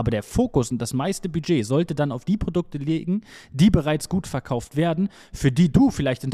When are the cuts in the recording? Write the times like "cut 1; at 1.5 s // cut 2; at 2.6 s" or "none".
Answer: none